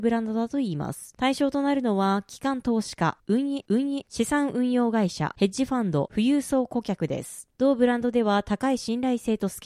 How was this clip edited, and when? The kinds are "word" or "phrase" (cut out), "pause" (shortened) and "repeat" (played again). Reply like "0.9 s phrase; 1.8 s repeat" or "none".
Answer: 3.7 s repeat

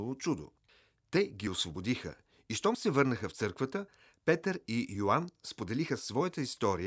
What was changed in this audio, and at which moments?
none

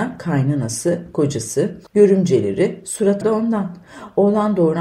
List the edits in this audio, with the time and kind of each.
1.9 s pause; 3.2 s word

